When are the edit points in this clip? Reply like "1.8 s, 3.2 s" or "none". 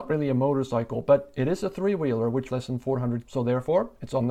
2.5 s, 3.2 s